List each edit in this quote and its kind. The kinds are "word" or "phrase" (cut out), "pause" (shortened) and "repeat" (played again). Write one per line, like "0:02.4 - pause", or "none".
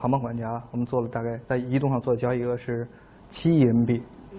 none